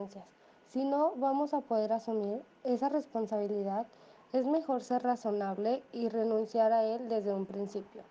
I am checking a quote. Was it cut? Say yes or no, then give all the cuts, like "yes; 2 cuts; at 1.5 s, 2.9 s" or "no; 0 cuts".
no; 0 cuts